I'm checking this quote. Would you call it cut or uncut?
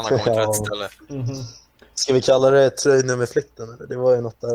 uncut